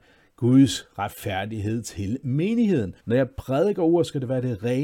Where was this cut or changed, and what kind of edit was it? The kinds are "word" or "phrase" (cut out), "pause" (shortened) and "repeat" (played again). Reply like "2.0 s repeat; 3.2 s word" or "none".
3.0 s pause